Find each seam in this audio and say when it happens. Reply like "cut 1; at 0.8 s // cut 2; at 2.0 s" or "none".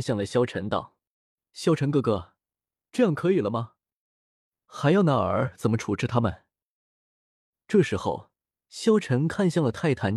none